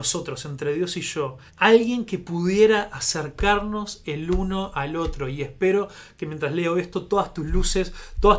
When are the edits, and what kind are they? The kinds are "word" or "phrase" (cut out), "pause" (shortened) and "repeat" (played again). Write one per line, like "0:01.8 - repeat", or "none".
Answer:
0:01.5 - pause